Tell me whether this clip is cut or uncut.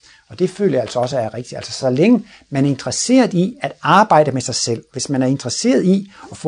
uncut